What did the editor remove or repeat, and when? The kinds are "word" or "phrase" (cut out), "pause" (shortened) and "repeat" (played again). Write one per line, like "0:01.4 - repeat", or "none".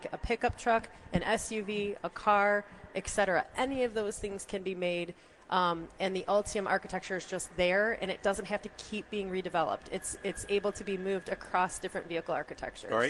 none

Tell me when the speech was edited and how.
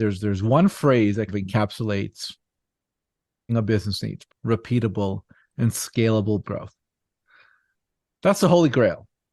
0:01.3 - word
0:03.5 - word
0:04.3 - word
0:06.4 - word

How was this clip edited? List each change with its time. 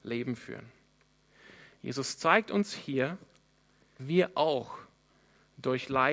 0:04.0 - word

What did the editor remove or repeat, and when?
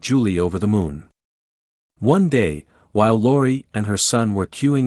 none

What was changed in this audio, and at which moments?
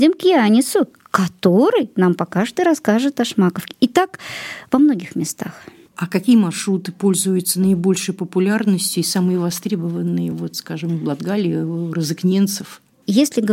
none

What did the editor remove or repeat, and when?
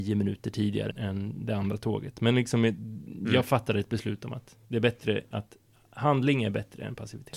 0:00.9 - word
0:04.6 - pause

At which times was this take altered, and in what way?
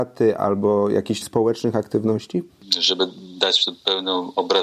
0:01.2 - word

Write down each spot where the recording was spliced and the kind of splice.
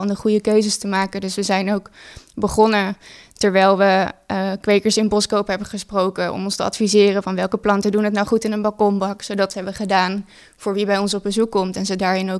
0:09.5 - phrase

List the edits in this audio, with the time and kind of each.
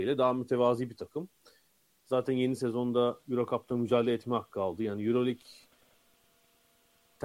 none

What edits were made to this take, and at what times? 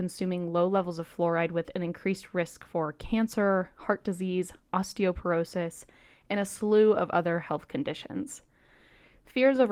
none

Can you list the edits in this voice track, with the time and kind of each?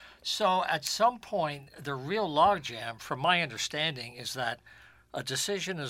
none

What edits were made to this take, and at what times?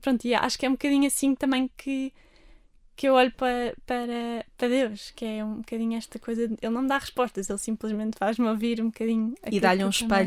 none

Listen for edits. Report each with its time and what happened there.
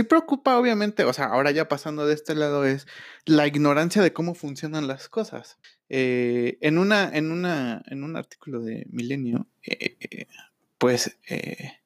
0:05.6 - pause

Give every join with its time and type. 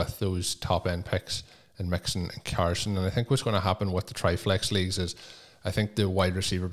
none

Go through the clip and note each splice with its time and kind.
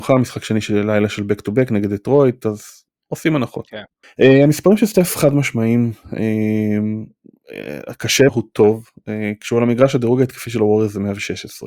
0:02.9 - pause
0:04.0 - pause
0:08.3 - phrase

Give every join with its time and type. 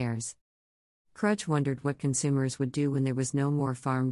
none

